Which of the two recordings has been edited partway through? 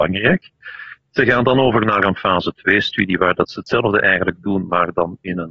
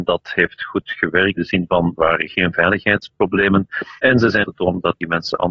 second; 4 cuts; at 1.4 s, 2.0 s, 4.0 s, 4.4 s

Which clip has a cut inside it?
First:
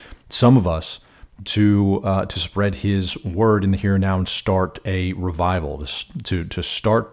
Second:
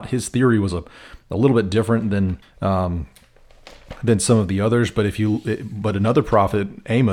second; 1 cut; at 2.4 s

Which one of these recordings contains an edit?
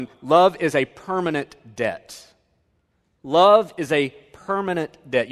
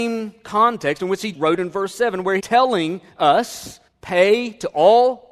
second; 3 cuts; at 1.3 s, 2.4 s, 3.9 s

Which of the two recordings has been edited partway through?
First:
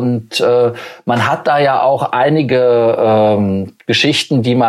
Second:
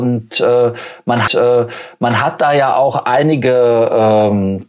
second; 1 cut; at 1.3 s

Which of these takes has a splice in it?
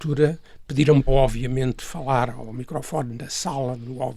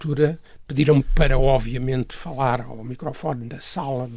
first; 1 cut; at 1.1 s

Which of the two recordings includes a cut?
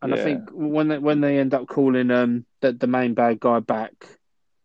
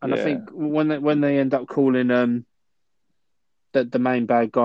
first; 1 cut; at 2.5 s

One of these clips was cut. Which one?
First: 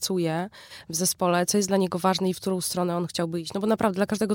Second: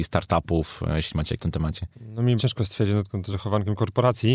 second; 4 cuts; at 1.4 s, 1.9 s, 2.4 s, 3.3 s

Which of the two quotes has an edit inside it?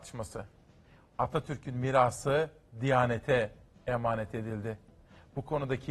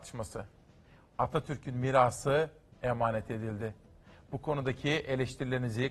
second; 1 cut; at 2.7 s

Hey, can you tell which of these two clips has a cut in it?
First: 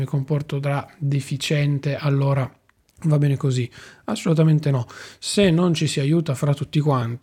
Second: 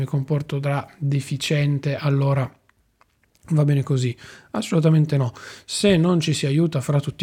first; 1 cut; at 2.8 s

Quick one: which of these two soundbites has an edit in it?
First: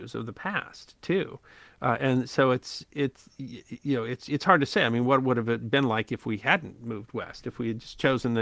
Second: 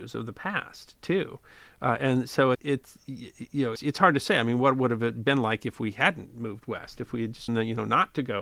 second; 3 cuts; at 2.5 s, 3.8 s, 7.5 s

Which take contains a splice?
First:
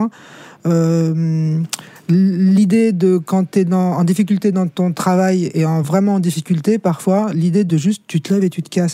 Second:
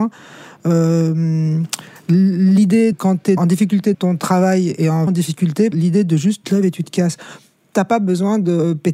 second; 6 cuts; at 2.9 s, 3.4 s, 3.9 s, 5.1 s, 5.7 s, 6.4 s

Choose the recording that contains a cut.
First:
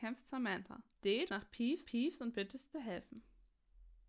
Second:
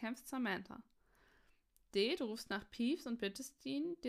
first; 4 cuts; at 0.9 s, 1.3 s, 1.8 s, 2.7 s

